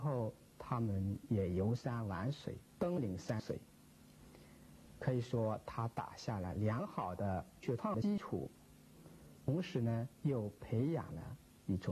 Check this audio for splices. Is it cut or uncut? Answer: cut